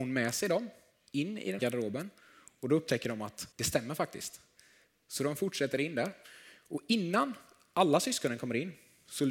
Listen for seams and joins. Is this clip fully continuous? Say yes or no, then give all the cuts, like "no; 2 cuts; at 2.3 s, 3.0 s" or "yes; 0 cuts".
no; 2 cuts; at 1.6 s, 3.5 s